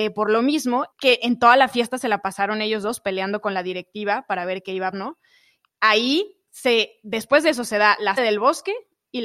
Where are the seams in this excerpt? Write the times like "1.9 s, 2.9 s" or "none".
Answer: 0.9 s, 4.9 s, 8.2 s